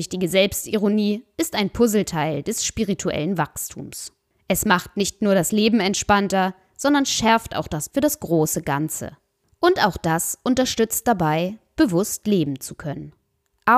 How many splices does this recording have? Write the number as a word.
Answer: one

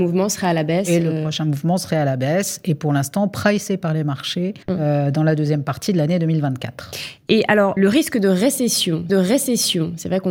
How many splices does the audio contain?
three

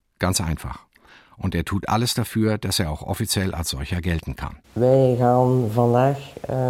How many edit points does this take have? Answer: one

